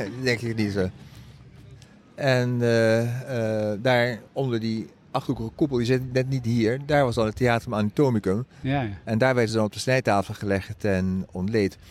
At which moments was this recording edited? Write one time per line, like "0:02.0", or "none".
none